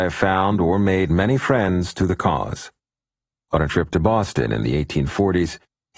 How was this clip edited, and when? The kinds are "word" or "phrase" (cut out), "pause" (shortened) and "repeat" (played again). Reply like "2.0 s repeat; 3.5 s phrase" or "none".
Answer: none